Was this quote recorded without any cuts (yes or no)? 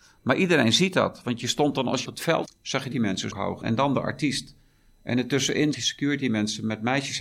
no